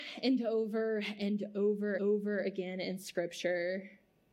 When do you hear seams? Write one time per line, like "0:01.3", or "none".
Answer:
0:02.0